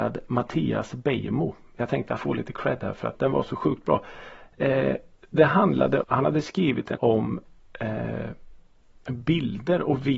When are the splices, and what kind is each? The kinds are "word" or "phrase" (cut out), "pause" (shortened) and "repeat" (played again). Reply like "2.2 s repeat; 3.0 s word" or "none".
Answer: 2.2 s phrase; 3.1 s word; 6.0 s word; 6.9 s word